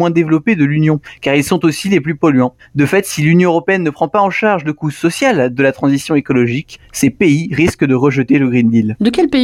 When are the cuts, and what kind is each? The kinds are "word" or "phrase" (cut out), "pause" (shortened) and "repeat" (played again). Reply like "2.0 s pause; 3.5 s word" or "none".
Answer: none